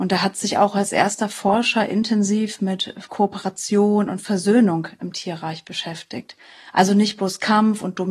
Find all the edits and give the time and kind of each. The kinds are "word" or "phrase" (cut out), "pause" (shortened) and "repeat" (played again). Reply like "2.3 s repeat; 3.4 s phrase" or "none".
none

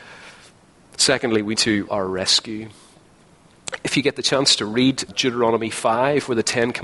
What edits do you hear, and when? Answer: 1.5 s word; 1.9 s word; 5.1 s word

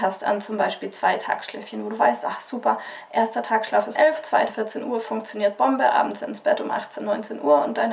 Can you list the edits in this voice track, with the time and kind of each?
3.9 s word; 4.5 s word

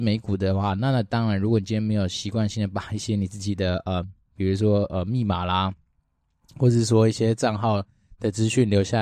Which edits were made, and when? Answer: none

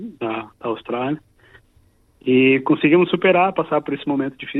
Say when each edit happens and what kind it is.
none

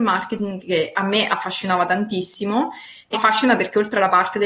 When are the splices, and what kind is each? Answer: 3.1 s word

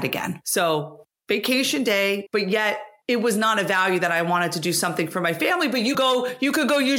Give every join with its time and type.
2.3 s phrase; 5.9 s word

